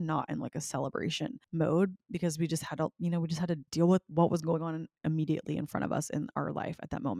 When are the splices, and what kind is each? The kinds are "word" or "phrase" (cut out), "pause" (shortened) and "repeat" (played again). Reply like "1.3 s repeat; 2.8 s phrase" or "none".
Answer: 3.7 s pause